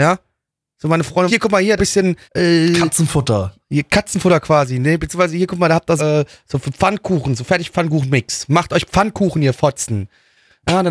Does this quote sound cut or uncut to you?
cut